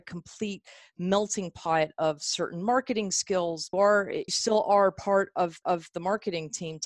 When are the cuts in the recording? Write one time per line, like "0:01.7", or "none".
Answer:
0:03.7
0:04.3
0:05.6